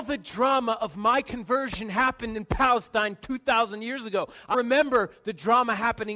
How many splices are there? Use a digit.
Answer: 1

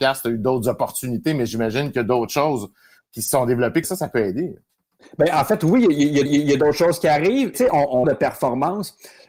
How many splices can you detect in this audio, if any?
4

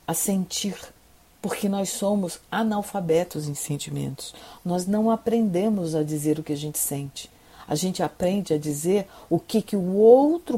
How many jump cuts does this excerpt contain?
0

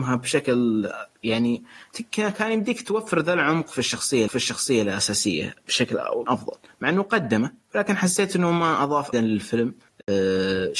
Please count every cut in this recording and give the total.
5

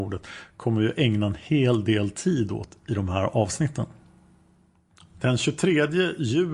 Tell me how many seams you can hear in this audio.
0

